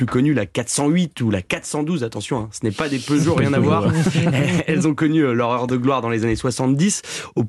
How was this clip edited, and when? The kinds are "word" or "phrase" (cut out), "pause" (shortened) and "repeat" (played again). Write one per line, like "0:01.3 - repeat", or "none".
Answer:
none